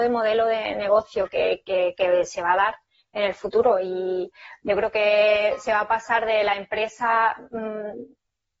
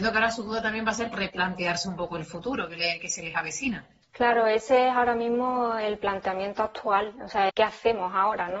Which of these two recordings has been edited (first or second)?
second